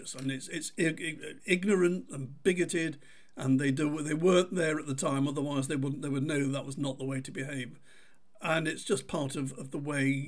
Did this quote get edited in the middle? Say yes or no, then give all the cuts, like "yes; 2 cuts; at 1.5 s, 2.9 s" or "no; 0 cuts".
no; 0 cuts